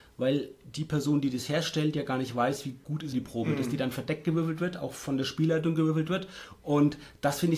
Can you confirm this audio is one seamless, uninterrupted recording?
no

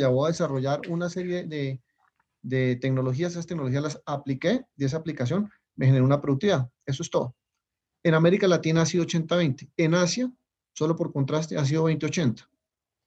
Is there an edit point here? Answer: no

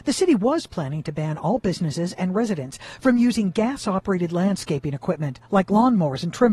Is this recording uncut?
yes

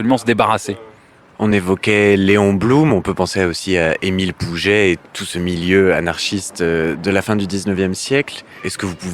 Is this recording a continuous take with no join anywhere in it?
yes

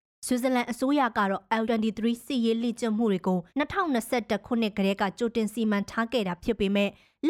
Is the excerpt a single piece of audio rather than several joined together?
no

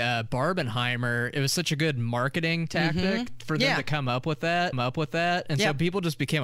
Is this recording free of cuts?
no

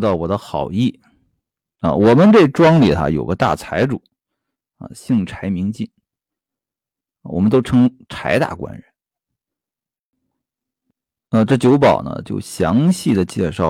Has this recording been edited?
no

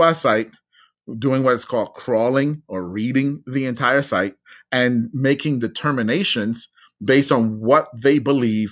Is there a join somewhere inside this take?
no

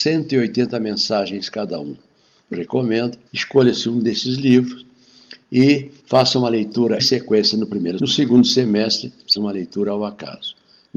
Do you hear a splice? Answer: yes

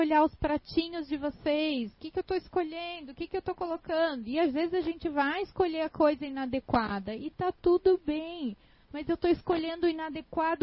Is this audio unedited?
yes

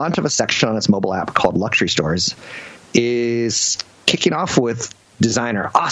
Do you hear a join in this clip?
no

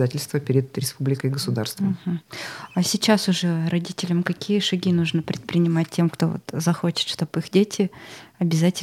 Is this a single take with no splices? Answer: yes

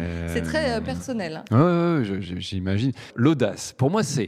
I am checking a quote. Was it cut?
no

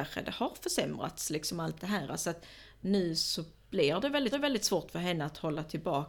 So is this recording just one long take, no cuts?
no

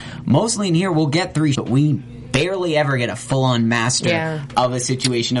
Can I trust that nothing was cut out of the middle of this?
no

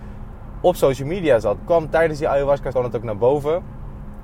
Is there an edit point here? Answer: yes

